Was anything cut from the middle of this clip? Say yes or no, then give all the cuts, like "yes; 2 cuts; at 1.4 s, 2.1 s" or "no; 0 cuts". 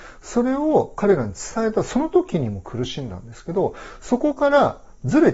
no; 0 cuts